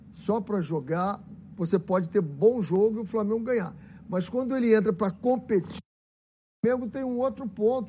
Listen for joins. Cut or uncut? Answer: uncut